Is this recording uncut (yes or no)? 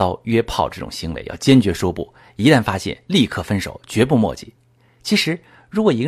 yes